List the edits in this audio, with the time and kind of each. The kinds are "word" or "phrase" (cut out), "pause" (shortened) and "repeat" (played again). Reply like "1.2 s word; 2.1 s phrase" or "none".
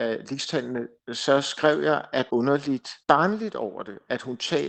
2.3 s phrase; 3.0 s pause